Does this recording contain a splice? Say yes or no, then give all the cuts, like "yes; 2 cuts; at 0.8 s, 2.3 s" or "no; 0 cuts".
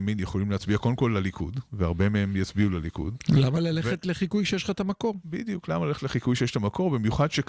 no; 0 cuts